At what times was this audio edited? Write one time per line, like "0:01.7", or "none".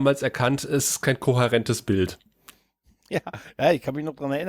none